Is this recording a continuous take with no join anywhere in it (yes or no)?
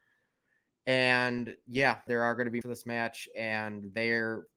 no